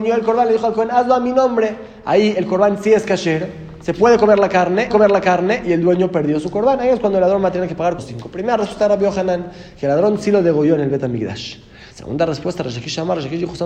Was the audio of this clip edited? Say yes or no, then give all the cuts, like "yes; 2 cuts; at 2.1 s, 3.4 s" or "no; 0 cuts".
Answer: yes; 3 cuts; at 4.9 s, 8.0 s, 11.9 s